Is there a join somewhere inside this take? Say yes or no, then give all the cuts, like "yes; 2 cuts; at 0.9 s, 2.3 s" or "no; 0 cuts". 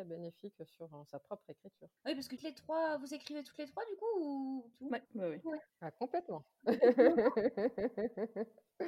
yes; 4 cuts; at 2.0 s, 2.4 s, 4.7 s, 5.1 s